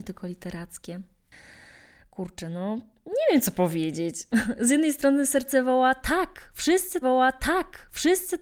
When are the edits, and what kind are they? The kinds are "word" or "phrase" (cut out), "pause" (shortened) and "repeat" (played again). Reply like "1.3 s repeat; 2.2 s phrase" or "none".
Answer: 7.0 s repeat